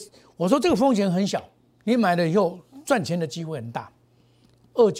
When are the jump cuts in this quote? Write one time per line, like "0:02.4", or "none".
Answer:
0:01.7